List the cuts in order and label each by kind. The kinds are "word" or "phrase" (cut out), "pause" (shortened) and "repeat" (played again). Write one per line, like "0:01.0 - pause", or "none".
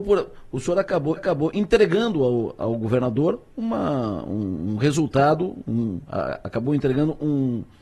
0:01.2 - repeat

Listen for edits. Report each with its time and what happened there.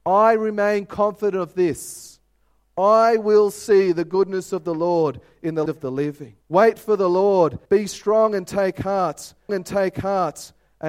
0:05.7 - word
0:06.4 - pause
0:07.7 - pause
0:09.5 - repeat

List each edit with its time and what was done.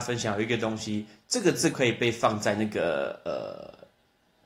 0:01.7 - word

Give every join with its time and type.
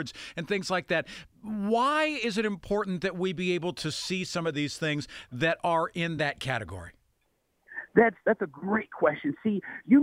none

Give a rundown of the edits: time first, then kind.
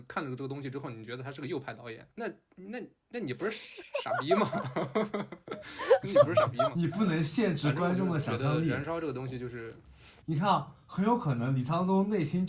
0:02.1 - pause
0:10.2 - pause

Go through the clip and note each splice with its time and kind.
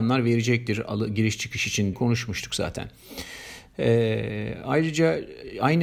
0:01.9 - word

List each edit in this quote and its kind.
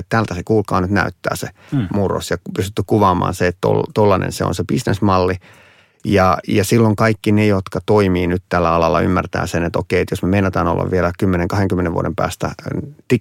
none

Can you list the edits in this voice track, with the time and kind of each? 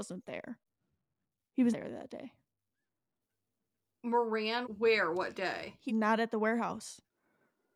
0:01.7 - word
0:04.6 - word
0:05.9 - word

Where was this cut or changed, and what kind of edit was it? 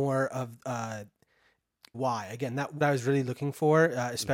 0:01.9 - phrase
0:02.8 - phrase

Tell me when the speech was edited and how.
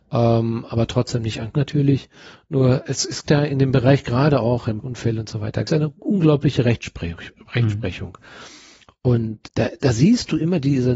0:01.5 - word
0:03.2 - word
0:04.8 - word
0:05.7 - word
0:09.4 - word

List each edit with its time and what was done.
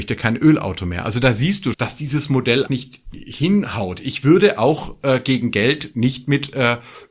0:01.7 - word
0:02.7 - word

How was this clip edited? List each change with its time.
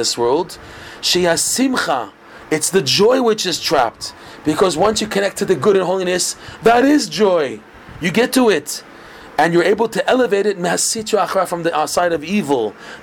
none

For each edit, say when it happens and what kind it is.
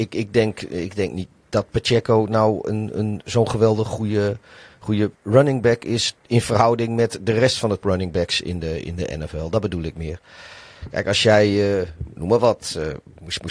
0:05.1 - pause
0:06.2 - pause
0:07.8 - word

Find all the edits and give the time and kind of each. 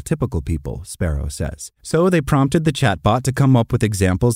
0:01.8 - pause

